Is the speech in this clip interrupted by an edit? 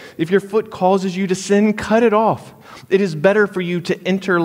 no; 0 cuts

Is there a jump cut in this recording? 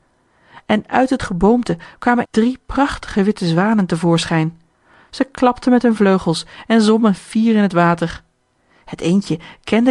yes; 1 cut; at 2.3 s

